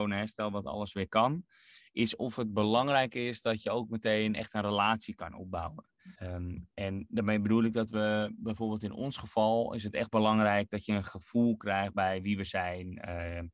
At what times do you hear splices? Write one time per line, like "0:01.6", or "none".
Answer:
0:06.2